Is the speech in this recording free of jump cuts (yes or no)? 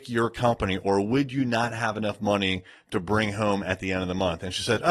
yes